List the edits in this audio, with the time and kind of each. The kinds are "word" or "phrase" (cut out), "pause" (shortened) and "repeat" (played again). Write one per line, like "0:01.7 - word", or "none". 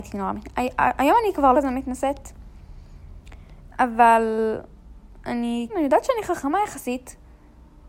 0:01.5 - word
0:05.7 - word